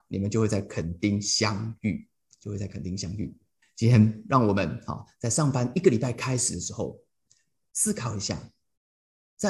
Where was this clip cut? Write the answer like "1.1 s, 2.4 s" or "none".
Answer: 3.6 s